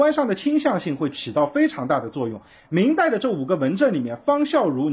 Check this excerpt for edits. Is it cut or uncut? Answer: uncut